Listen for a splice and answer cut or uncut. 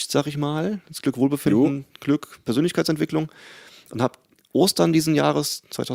uncut